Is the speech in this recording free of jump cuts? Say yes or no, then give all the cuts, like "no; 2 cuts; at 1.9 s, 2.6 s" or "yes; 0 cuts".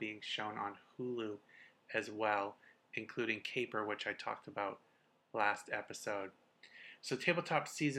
yes; 0 cuts